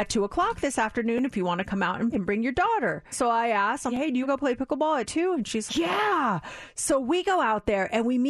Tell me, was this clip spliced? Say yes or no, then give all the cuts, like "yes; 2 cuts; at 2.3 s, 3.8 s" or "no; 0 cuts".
yes; 5 cuts; at 2.1 s, 3.1 s, 3.9 s, 4.2 s, 5.7 s